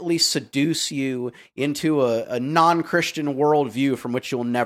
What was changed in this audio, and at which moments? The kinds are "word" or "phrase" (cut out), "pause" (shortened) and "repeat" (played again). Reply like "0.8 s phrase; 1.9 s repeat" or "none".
none